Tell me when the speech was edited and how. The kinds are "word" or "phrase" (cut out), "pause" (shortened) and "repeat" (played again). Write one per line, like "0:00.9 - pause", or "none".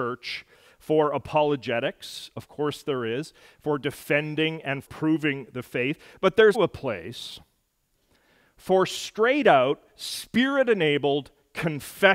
0:04.9 - word
0:06.5 - word